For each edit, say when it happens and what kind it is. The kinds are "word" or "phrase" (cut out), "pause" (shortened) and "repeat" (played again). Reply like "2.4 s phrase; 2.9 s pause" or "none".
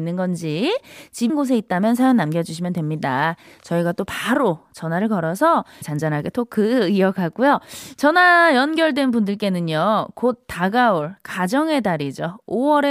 1.3 s word; 5.8 s word